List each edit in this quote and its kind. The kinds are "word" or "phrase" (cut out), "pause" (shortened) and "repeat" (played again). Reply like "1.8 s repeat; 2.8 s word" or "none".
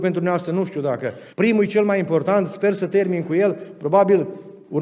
1.3 s pause